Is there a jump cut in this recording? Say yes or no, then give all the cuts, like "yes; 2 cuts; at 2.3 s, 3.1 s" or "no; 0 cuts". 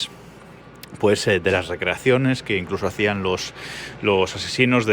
no; 0 cuts